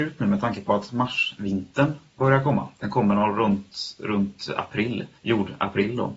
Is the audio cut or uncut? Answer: cut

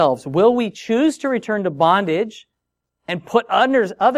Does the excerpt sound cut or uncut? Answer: uncut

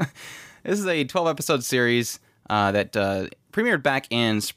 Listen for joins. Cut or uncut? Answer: uncut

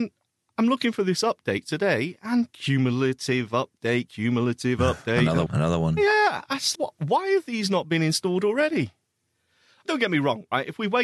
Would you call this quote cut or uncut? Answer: cut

